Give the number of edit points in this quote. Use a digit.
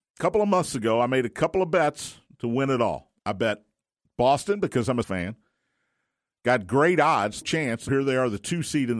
4